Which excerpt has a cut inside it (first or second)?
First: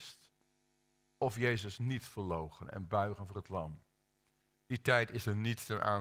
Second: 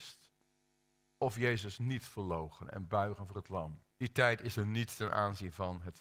second